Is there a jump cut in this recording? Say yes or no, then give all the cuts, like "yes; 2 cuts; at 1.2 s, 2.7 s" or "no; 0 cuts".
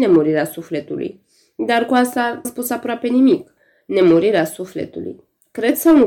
yes; 1 cut; at 2.4 s